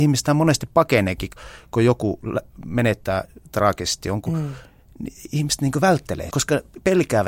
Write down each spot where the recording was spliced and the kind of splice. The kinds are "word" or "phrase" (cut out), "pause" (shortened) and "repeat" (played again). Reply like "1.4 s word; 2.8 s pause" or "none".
6.3 s word